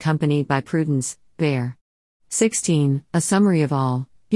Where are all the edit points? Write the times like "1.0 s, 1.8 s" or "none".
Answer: none